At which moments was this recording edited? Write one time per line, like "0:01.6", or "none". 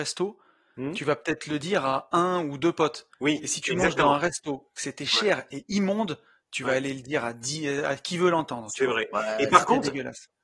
0:03.1